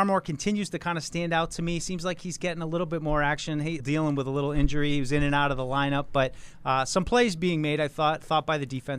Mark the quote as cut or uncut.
cut